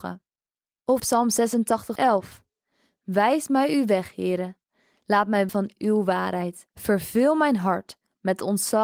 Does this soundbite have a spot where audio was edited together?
yes; 4 cuts; at 1.0 s, 2.0 s, 5.5 s, 6.7 s

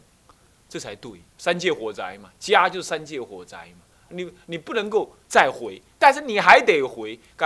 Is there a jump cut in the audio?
yes; 1 cut; at 1.3 s

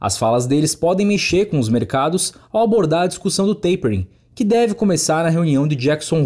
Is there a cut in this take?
no; 0 cuts

